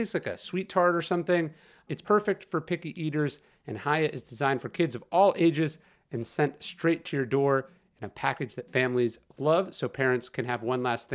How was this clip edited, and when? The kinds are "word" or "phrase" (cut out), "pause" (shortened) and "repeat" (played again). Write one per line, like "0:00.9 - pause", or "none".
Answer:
none